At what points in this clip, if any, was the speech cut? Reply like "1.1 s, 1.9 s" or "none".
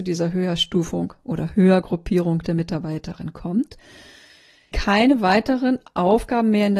4.7 s